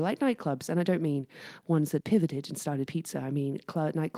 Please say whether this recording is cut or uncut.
cut